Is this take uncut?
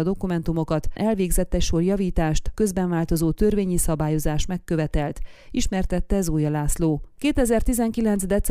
no; 2 cuts; at 1.0 s, 2.5 s

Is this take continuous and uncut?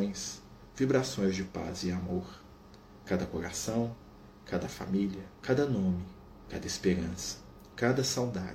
no; 1 cut; at 5.4 s

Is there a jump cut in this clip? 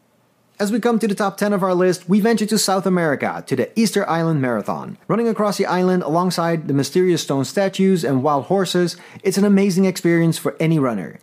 yes; 1 cut; at 5.0 s

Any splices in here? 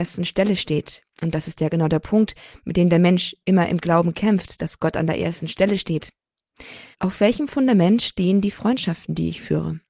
yes; 2 cuts; at 1.1 s, 6.9 s

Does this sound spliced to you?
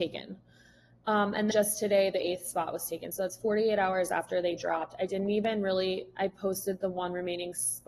yes; 1 cut; at 1.5 s

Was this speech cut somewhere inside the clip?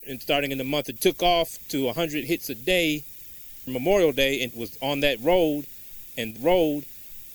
yes; 4 cuts; at 1.0 s, 3.7 s, 4.5 s, 6.4 s

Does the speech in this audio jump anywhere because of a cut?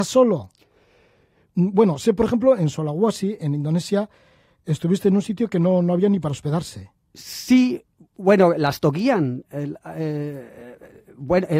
yes; 1 cut; at 7.0 s

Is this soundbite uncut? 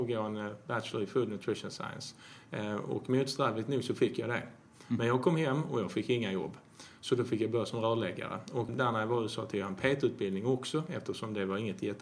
no; 1 cut; at 8.7 s

